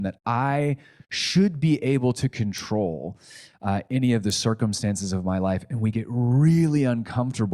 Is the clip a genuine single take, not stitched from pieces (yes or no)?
yes